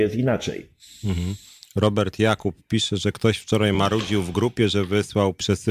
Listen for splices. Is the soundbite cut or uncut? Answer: uncut